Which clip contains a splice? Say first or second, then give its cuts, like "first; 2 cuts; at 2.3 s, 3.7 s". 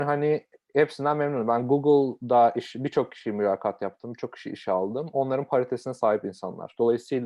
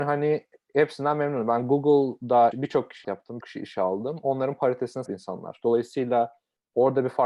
second; 4 cuts; at 2.5 s, 3.0 s, 3.4 s, 5.1 s